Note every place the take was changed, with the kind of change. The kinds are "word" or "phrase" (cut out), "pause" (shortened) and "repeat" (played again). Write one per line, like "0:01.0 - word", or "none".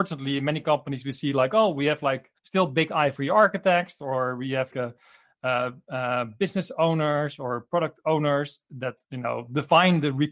0:02.4 - pause
0:04.7 - word
0:09.0 - pause